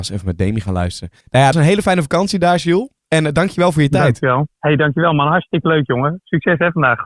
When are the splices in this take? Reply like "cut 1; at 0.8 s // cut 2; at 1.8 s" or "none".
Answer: cut 1; at 1.2 s // cut 2; at 1.5 s // cut 3; at 4.5 s